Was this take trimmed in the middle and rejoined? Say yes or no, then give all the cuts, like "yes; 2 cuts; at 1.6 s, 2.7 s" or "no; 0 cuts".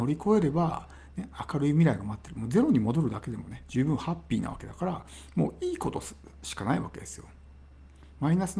no; 0 cuts